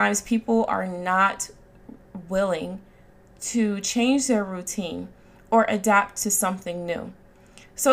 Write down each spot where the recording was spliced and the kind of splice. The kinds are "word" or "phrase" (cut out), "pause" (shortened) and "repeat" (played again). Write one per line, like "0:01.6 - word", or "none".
none